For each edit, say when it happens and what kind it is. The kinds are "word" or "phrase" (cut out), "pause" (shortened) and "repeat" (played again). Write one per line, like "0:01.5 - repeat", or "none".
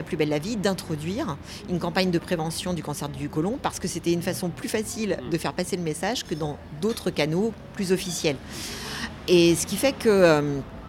none